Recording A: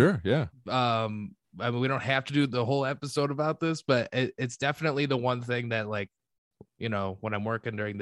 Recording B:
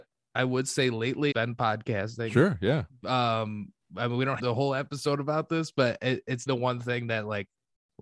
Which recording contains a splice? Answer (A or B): B